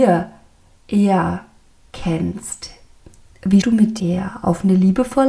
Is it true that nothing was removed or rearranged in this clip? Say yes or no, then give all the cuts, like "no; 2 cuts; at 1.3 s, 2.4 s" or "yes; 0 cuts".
no; 2 cuts; at 3.6 s, 4.0 s